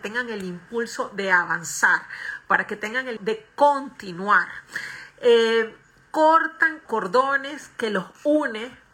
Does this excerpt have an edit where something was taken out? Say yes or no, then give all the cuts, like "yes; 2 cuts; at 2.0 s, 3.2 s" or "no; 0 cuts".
yes; 2 cuts; at 3.2 s, 6.9 s